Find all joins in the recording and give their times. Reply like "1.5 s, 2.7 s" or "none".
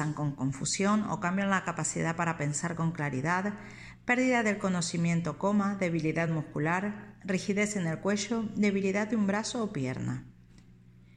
none